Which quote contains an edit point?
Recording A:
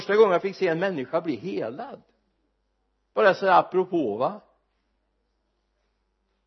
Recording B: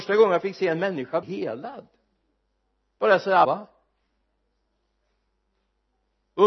B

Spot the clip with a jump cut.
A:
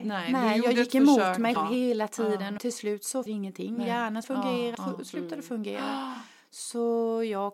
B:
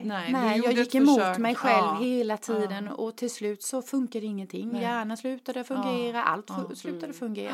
A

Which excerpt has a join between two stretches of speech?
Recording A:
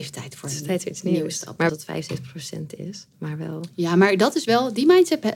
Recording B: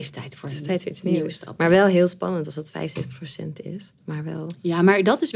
A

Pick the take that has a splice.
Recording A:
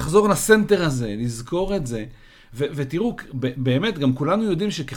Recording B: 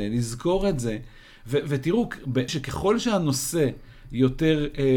B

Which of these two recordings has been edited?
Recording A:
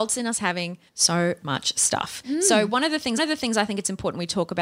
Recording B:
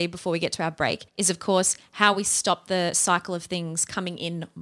A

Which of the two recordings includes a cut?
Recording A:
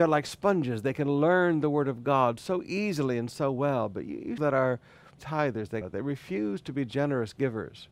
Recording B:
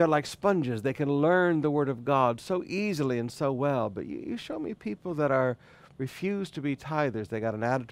A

